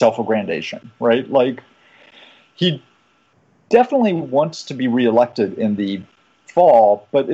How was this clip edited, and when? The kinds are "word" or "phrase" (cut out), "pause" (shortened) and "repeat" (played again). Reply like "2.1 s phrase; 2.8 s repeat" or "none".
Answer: none